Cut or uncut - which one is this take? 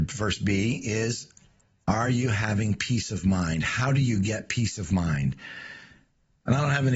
uncut